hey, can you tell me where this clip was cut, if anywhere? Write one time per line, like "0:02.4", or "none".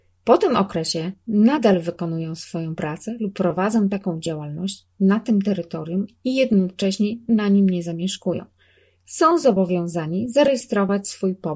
none